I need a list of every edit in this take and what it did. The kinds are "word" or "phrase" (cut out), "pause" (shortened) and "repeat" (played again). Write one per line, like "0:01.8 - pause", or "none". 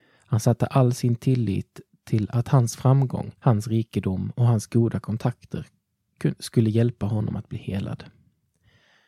0:03.4 - pause